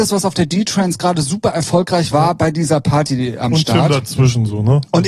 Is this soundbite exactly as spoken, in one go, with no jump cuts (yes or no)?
no